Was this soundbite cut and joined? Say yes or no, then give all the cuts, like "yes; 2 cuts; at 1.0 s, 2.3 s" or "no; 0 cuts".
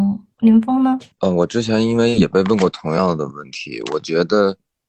yes; 1 cut; at 1.1 s